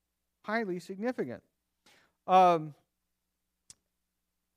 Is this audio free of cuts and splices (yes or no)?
yes